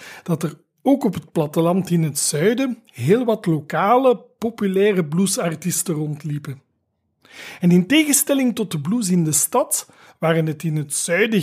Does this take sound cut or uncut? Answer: uncut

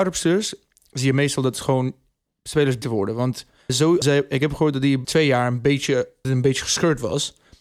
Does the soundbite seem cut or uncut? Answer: cut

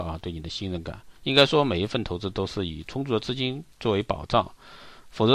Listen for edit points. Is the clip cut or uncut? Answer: cut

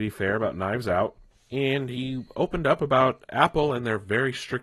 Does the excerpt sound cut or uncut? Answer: uncut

